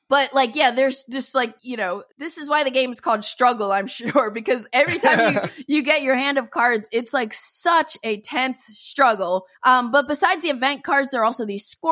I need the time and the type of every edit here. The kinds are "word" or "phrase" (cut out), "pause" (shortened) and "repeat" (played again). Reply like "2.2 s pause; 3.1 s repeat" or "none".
1.6 s pause; 2.1 s pause; 9.5 s pause